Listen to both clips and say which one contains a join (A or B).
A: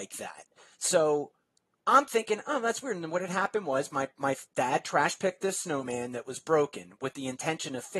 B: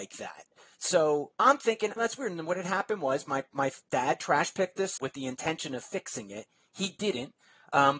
B